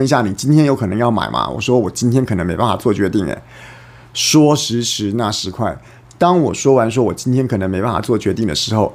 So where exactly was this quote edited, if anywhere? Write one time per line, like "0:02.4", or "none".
none